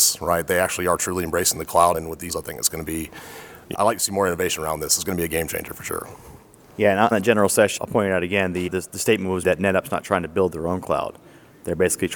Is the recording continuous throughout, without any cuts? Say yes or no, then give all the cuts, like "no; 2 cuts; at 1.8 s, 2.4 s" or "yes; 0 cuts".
no; 7 cuts; at 1.9 s, 2.3 s, 3.7 s, 7.1 s, 7.8 s, 8.7 s, 9.4 s